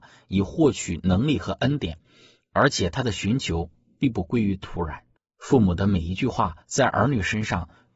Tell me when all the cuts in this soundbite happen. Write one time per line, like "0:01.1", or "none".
0:06.6